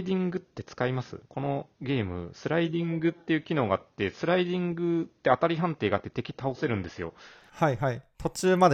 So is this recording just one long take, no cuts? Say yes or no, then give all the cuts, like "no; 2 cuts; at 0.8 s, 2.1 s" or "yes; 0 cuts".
no; 2 cuts; at 1.3 s, 1.7 s